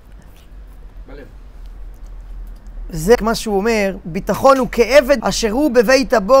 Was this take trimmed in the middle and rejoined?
yes; 2 cuts; at 3.1 s, 5.2 s

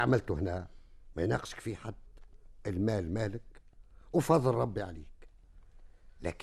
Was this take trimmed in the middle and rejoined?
no; 0 cuts

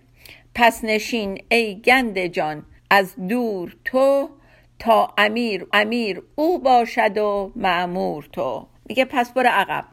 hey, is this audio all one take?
no; 3 cuts; at 2.8 s, 5.7 s, 8.8 s

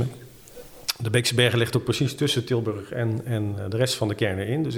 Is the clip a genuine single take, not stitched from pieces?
yes; 0 cuts

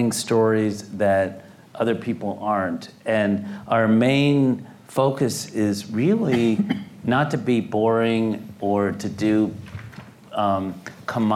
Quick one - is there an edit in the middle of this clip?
no; 0 cuts

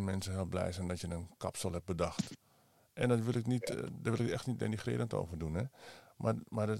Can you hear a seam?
no; 0 cuts

